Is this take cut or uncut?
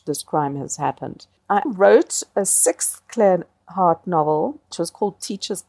cut